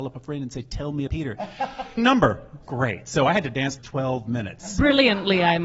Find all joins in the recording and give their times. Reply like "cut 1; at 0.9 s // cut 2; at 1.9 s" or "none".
cut 1; at 1.1 s // cut 2; at 2.0 s // cut 3; at 2.7 s // cut 4; at 3.8 s